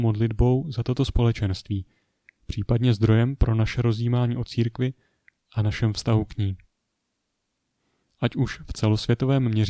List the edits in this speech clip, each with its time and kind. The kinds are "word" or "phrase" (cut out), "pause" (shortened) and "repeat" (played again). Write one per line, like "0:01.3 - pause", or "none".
none

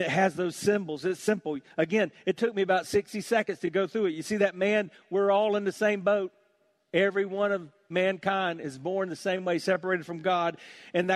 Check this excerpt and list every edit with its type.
none

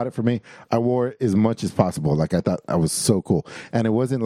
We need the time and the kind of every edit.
none

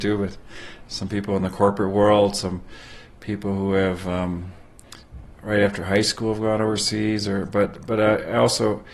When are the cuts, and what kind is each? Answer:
none

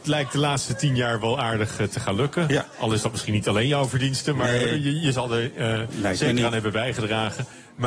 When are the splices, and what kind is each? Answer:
none

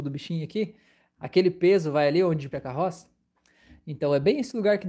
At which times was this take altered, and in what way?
0:02.5 - word

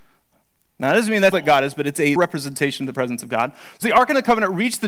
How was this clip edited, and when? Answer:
0:01.3 - word
0:02.2 - word
0:03.8 - word

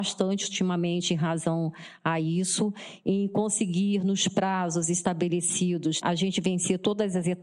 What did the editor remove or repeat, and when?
0:06.0 - word

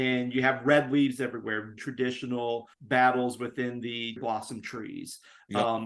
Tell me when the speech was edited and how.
0:01.8 - word
0:02.7 - pause
0:04.2 - word

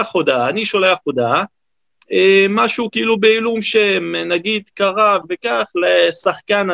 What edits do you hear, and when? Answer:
0:05.2 - word

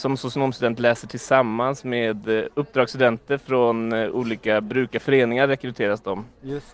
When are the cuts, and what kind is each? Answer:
none

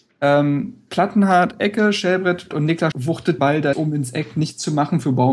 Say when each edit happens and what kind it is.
0:02.5 - word
0:02.9 - word
0:03.4 - word
0:03.7 - word

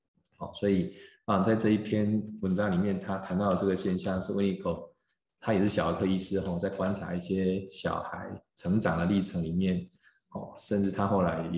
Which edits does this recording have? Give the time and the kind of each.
none

